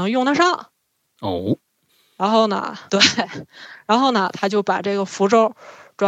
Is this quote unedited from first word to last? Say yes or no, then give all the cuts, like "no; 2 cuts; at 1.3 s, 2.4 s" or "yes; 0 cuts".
no; 1 cut; at 2.9 s